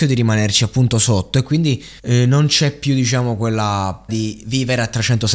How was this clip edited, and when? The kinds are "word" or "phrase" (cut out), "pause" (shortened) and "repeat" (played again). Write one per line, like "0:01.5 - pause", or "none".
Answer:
0:02.0 - pause
0:04.1 - word